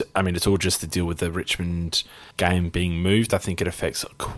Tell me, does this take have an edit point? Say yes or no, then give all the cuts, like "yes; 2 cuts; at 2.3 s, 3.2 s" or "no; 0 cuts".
yes; 1 cut; at 2.3 s